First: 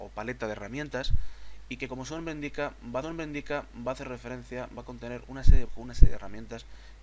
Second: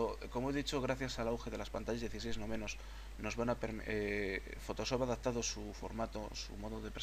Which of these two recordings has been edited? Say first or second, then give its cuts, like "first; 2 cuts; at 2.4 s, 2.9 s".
first; 3 cuts; at 3.0 s, 4.7 s, 5.7 s